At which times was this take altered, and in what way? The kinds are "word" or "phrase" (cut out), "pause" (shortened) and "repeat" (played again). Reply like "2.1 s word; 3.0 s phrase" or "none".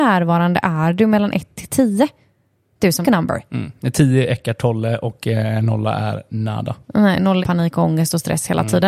3.0 s phrase; 7.4 s word